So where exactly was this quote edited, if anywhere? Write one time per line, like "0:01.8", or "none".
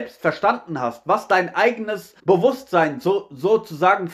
0:02.2